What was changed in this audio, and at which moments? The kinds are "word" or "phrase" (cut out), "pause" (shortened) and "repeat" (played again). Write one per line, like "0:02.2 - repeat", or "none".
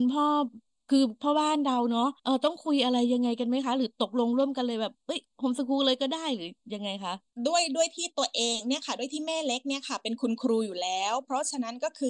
0:02.2 - pause